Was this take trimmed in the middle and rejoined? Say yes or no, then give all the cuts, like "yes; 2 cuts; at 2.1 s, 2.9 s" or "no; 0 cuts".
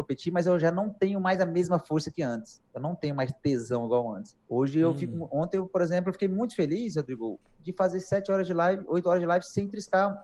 yes; 1 cut; at 4.4 s